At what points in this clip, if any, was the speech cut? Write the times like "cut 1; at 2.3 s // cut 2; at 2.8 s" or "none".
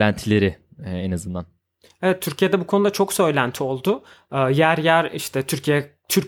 none